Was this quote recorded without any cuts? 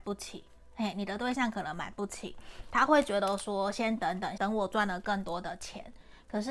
no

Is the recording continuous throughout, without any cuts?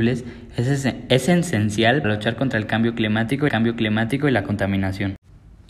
no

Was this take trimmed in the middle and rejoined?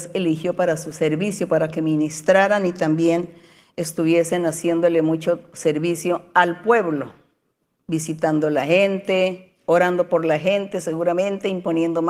no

